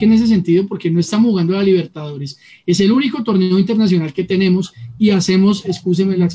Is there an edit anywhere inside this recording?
no; 0 cuts

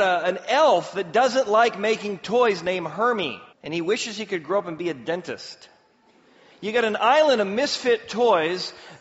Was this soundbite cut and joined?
yes; 1 cut; at 3.5 s

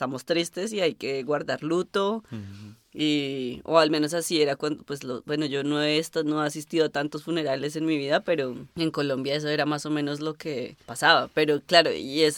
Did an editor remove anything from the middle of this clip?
yes; 2 cuts; at 8.7 s, 10.8 s

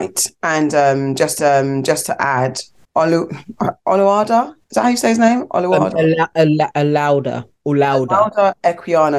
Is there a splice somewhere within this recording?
yes; 3 cuts; at 1.4 s, 2.8 s, 4.6 s

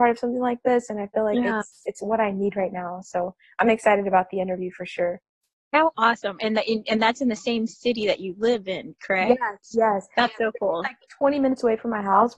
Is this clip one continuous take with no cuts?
yes; 0 cuts

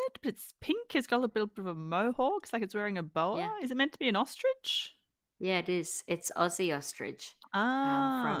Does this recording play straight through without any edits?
yes; 0 cuts

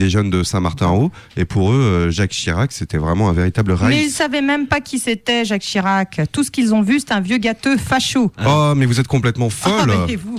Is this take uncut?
yes; 0 cuts

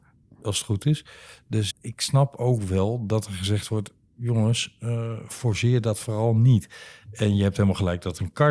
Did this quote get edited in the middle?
yes; 1 cut; at 1.7 s

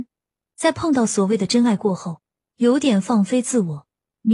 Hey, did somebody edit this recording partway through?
no; 0 cuts

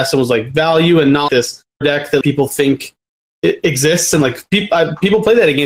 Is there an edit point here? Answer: yes; 3 cuts; at 1.3 s, 1.8 s, 2.2 s

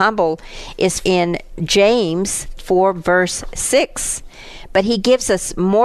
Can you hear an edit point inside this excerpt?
yes; 2 cuts; at 1.0 s, 2.6 s

